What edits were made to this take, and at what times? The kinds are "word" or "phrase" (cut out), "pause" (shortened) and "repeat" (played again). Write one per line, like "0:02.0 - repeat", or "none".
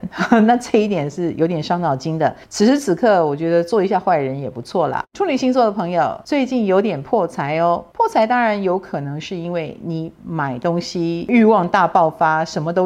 0:05.1 - pause